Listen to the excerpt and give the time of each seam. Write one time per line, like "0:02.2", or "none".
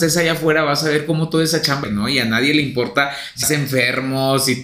0:01.8
0:03.4